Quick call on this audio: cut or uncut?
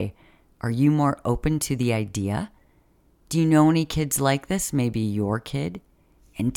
uncut